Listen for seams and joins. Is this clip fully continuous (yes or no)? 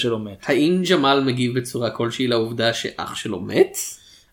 yes